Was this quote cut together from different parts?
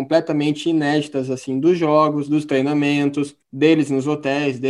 yes; 1 cut; at 3.4 s

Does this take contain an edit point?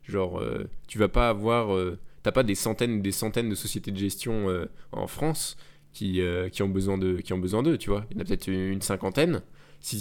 no; 0 cuts

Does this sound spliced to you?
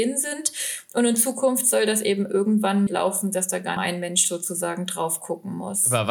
yes; 2 cuts; at 2.9 s, 3.8 s

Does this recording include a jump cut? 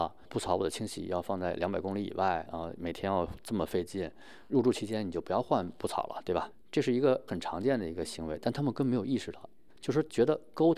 yes; 1 cut; at 4.5 s

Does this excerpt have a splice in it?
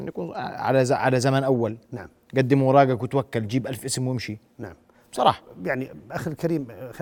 no; 0 cuts

